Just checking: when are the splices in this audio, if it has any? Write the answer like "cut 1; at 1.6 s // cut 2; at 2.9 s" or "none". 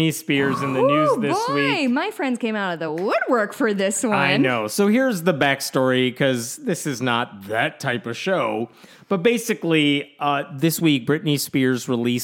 none